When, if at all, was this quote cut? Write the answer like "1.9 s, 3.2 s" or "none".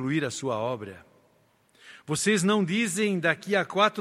none